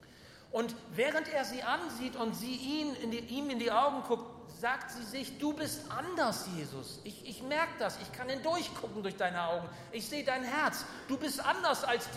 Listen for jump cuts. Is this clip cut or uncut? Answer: uncut